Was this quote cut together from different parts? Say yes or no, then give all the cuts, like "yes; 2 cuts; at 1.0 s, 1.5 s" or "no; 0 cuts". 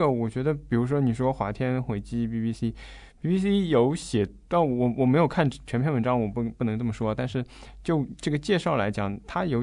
yes; 1 cut; at 4.4 s